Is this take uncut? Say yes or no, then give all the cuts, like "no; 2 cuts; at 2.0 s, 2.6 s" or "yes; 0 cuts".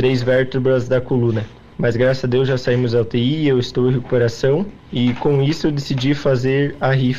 yes; 0 cuts